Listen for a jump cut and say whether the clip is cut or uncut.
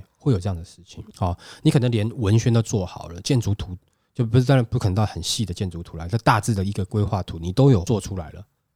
uncut